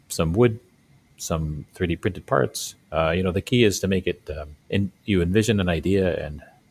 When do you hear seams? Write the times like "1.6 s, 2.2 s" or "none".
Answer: 4.6 s